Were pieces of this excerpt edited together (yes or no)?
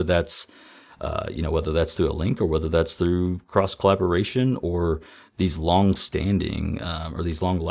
no